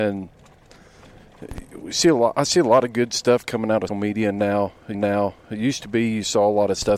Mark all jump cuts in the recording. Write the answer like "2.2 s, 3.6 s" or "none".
3.9 s, 4.9 s